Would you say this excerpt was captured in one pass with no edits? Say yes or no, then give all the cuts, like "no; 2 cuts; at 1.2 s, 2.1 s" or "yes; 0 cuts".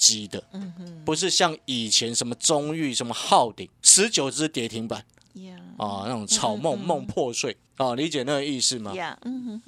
no; 2 cuts; at 3.7 s, 7.7 s